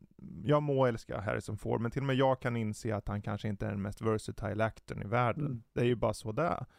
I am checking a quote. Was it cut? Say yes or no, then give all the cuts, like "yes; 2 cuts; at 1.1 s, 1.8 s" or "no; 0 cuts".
no; 0 cuts